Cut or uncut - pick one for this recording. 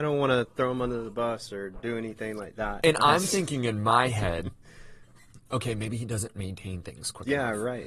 uncut